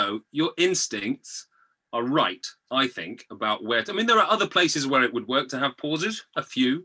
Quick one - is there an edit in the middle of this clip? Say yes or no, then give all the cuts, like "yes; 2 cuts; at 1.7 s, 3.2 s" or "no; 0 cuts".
no; 0 cuts